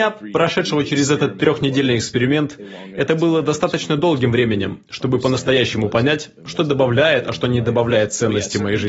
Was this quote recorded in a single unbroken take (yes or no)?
yes